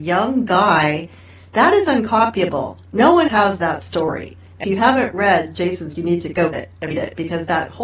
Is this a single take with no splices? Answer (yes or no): no